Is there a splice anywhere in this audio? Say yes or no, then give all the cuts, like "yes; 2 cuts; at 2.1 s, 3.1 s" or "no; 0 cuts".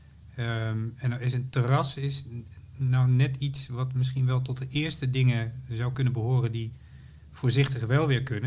no; 0 cuts